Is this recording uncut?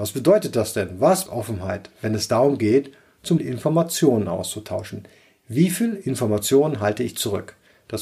no; 2 cuts; at 1.3 s, 3.4 s

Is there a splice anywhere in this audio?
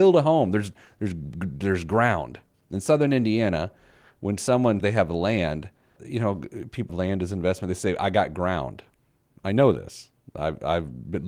yes; 3 cuts; at 4.8 s, 6.0 s, 6.9 s

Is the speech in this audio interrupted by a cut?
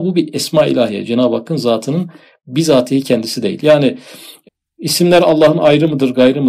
no; 0 cuts

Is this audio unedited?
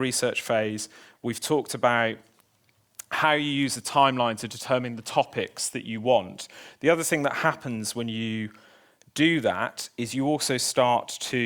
yes; 0 cuts

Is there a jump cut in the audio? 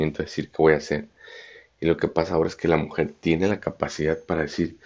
no; 0 cuts

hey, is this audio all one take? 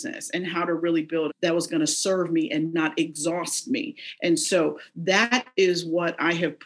no; 1 cut; at 1.3 s

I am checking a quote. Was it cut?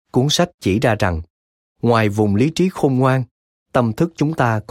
no; 0 cuts

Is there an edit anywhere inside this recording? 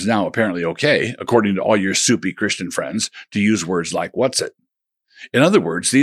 no; 0 cuts

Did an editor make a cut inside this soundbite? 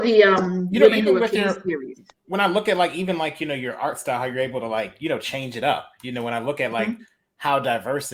no; 0 cuts

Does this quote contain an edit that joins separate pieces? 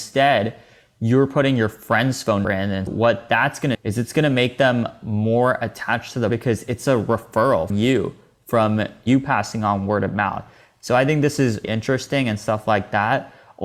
yes; 6 cuts; at 2.4 s, 2.9 s, 3.7 s, 6.3 s, 7.7 s, 11.6 s

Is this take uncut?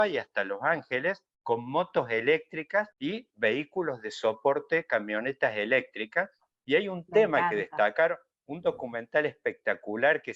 no; 1 cut; at 2.9 s

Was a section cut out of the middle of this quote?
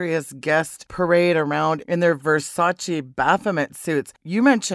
no; 0 cuts

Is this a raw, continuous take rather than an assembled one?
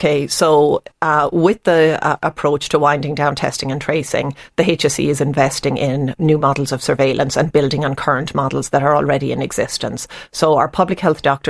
yes; 0 cuts

